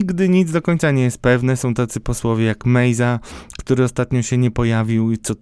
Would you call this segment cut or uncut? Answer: uncut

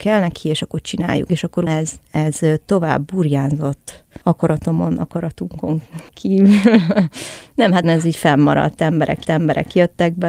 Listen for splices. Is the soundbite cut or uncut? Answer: cut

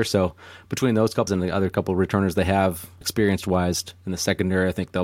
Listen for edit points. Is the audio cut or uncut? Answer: cut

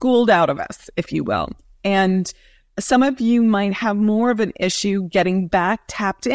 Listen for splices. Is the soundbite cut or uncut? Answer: uncut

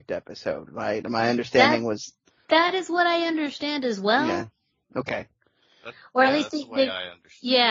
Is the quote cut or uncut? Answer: uncut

